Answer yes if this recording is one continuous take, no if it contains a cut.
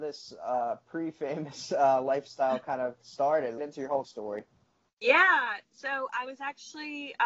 no